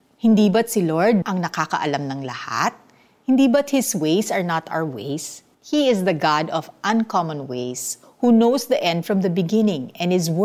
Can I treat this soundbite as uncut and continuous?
no; 2 cuts; at 1.2 s, 5.5 s

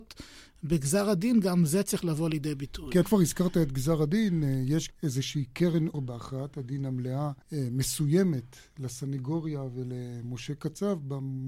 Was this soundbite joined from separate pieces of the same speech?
yes; 4 cuts; at 3.0 s, 4.9 s, 5.9 s, 7.4 s

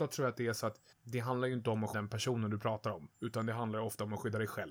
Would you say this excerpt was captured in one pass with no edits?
no; 3 cuts; at 0.9 s, 1.9 s, 3.1 s

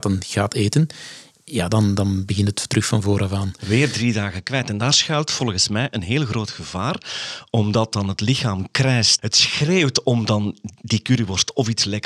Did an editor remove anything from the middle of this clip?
no; 0 cuts

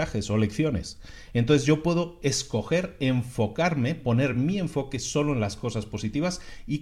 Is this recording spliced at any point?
no; 0 cuts

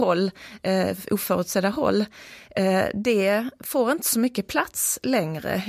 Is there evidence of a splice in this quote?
no; 0 cuts

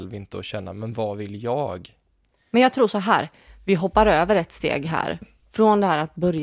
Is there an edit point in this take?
no; 0 cuts

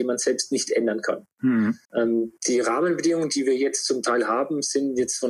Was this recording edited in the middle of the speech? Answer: yes; 1 cut; at 1.8 s

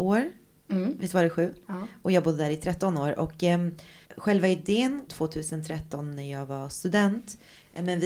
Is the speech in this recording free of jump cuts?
no; 2 cuts; at 4.1 s, 5.1 s

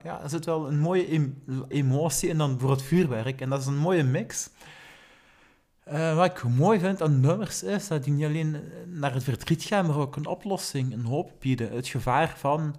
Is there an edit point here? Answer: yes; 1 cut; at 1.7 s

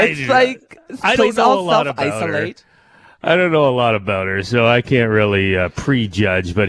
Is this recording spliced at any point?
no; 0 cuts

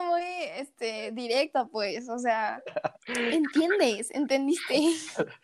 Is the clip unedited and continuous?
no; 1 cut; at 3.0 s

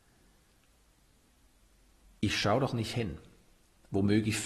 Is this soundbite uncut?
yes; 0 cuts

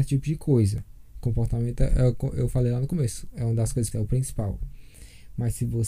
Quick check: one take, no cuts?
no; 1 cut; at 3.9 s

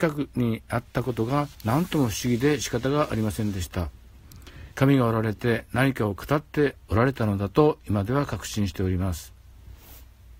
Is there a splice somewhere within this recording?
yes; 3 cuts; at 1.5 s, 4.7 s, 6.8 s

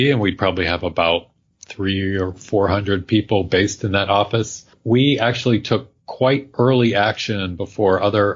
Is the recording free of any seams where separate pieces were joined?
yes; 0 cuts

